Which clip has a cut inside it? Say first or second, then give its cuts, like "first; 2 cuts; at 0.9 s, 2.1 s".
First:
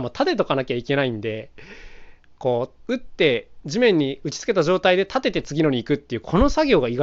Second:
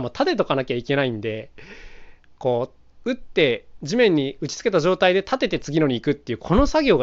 first; 1 cut; at 2.8 s